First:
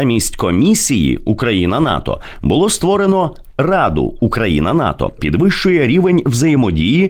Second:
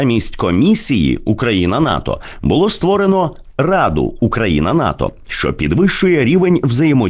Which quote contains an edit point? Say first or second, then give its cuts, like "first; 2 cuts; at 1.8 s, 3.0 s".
first; 1 cut; at 5.2 s